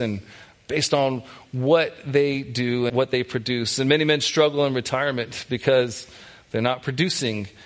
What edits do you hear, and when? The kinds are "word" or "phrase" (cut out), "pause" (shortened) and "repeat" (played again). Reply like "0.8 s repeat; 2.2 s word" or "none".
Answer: 2.9 s word

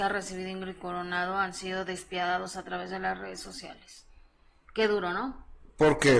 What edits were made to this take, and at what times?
none

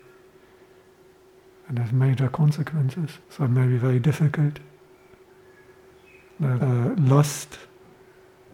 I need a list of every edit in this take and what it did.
3.2 s pause; 6.6 s word

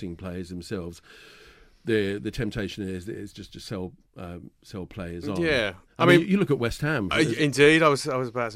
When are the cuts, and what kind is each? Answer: none

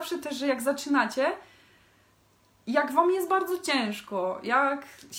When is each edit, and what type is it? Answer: none

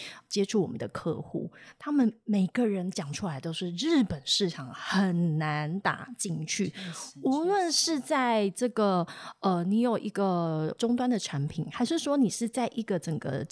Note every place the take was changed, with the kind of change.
none

